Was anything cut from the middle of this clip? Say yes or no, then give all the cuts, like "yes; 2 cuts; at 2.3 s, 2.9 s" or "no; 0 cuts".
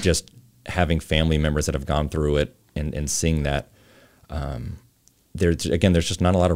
no; 0 cuts